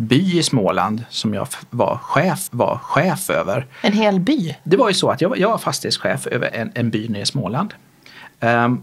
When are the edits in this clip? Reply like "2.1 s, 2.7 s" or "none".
2.5 s, 6.5 s

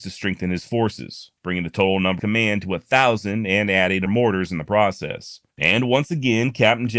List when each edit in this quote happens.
1.4 s, 2.2 s, 4.1 s, 5.5 s

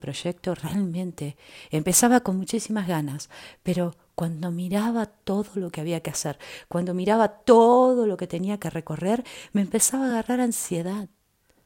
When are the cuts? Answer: none

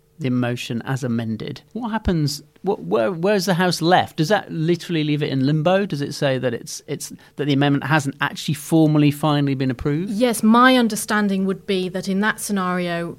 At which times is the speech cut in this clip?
1.7 s

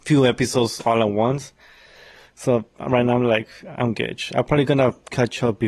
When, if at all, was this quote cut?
none

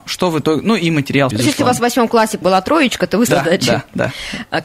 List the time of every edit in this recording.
1.3 s, 2.4 s, 3.3 s

